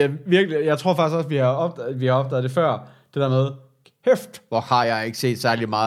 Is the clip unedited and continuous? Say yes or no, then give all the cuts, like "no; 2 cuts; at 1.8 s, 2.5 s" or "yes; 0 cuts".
yes; 0 cuts